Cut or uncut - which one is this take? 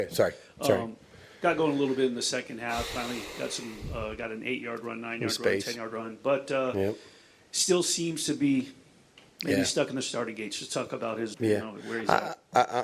cut